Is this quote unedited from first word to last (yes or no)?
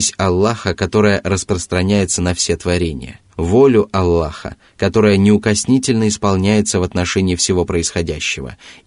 no